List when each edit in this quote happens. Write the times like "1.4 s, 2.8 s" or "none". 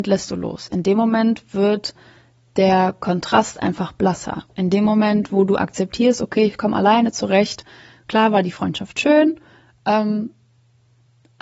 none